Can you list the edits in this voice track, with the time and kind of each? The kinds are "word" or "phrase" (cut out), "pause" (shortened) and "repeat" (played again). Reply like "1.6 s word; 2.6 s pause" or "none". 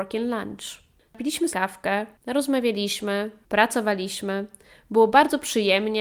1.5 s word

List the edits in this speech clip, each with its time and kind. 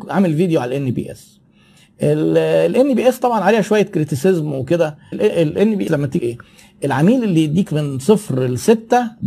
5.1 s word; 5.9 s word; 6.2 s phrase

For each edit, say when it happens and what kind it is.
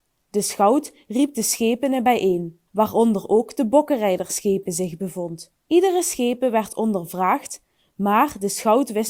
2.7 s pause; 5.6 s pause

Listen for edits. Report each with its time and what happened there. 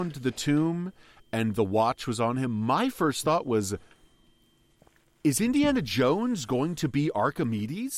none

